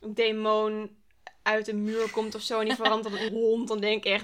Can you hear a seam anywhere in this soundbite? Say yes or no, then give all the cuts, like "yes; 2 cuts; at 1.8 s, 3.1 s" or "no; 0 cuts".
yes; 1 cut; at 3.3 s